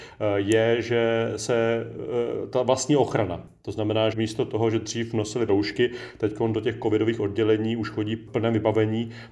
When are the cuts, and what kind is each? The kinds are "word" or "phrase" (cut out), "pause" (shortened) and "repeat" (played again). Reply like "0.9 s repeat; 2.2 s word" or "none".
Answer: 4.1 s word; 5.5 s word; 8.3 s phrase